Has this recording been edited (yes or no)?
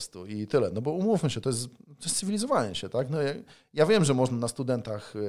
no